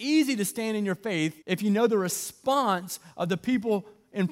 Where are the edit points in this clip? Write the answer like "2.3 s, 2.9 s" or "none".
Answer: 1.4 s